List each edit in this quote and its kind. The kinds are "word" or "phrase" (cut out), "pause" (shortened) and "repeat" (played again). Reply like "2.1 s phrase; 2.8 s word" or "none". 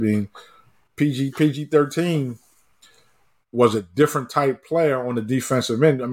1.3 s word

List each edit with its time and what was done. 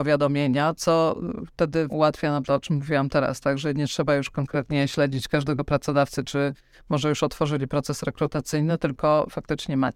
1.9 s word; 2.4 s word

